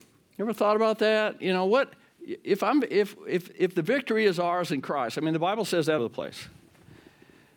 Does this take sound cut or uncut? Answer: cut